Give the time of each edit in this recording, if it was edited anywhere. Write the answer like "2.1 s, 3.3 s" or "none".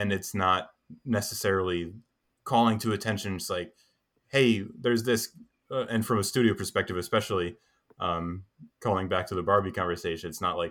none